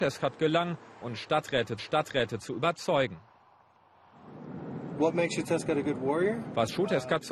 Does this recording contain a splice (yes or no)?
yes